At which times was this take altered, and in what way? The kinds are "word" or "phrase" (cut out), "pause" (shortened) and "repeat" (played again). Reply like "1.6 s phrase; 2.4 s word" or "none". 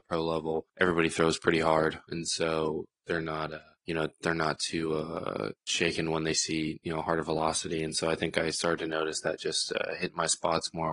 none